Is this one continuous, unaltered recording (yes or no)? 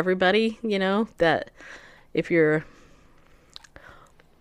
yes